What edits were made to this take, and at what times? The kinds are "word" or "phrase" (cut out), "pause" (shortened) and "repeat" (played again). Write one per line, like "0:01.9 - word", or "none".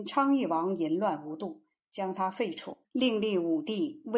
0:02.8 - pause